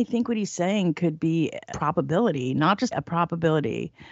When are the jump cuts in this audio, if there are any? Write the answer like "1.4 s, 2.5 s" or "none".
1.7 s, 2.9 s